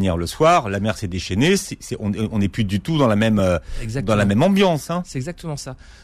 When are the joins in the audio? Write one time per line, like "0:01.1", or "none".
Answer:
none